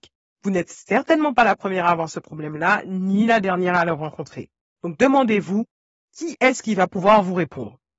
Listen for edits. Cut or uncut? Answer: uncut